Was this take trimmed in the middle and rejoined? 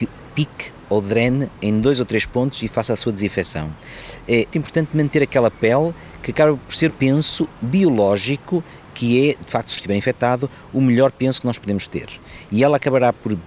yes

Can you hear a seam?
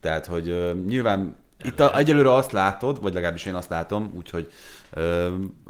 no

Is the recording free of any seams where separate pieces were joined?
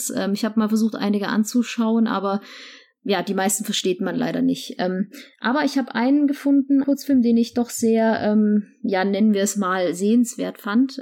no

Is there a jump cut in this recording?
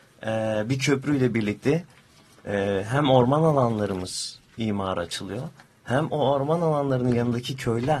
no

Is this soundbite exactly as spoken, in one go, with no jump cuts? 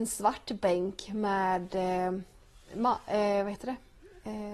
yes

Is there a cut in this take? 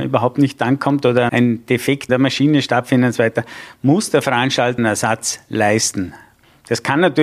yes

